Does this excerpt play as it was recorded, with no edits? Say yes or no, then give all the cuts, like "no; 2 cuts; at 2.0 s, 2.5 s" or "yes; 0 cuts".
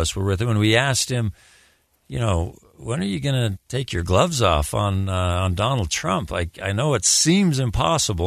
no; 1 cut; at 3.5 s